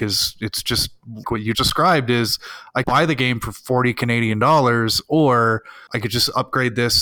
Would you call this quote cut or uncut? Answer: cut